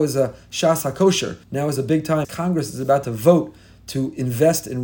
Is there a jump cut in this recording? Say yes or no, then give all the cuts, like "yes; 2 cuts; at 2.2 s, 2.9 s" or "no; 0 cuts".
yes; 2 cuts; at 1.4 s, 2.2 s